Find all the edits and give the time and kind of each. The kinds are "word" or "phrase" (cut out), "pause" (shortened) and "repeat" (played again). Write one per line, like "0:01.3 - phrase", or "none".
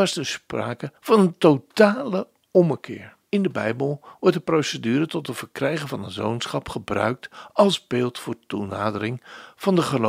0:01.0 - pause
0:03.3 - pause